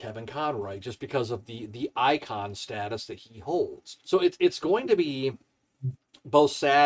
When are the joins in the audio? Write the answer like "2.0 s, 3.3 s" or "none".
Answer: 4.0 s